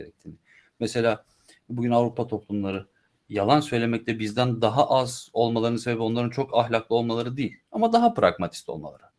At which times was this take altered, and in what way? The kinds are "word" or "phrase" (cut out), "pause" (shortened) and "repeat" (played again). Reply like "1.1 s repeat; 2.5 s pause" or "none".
none